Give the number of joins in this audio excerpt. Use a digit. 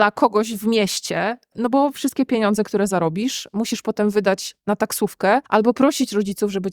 1